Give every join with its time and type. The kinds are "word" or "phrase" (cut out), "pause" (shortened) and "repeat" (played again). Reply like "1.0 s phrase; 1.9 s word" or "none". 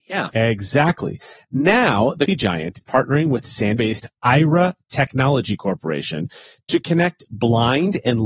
2.3 s word; 2.8 s word; 3.8 s word

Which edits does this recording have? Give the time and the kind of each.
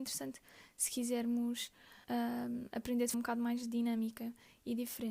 2.0 s pause; 3.1 s word

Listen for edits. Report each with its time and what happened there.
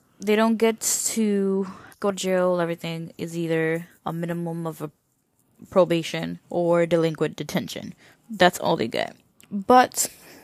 1.9 s pause; 4.0 s pause; 6.4 s pause

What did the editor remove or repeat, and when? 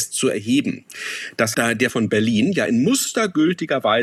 1.5 s word; 1.9 s word

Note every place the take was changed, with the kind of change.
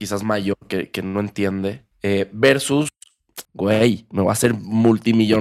1.9 s pause; 3.4 s pause

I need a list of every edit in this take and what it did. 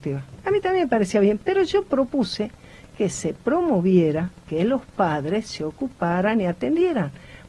none

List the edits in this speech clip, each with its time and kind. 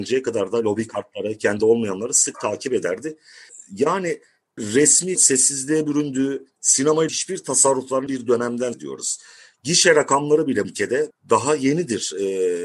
1.6 s word; 2.3 s word; 4.6 s word; 5.2 s word; 7.1 s word; 8.1 s word; 8.7 s word; 10.6 s word; 11.1 s word

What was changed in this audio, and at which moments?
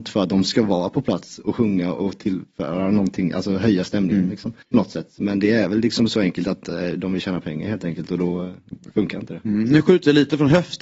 4.6 s pause

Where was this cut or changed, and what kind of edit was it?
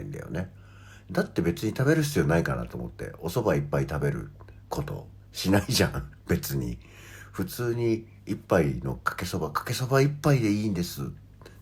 4.6 s pause

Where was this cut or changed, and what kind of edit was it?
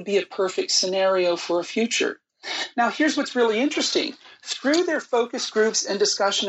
none

